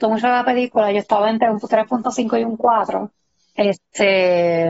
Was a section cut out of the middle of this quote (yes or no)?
yes